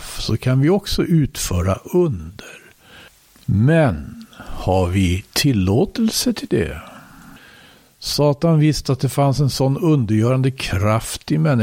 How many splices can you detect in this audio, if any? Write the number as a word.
zero